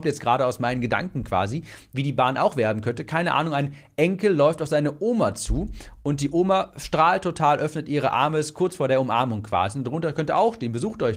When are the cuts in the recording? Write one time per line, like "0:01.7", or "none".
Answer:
none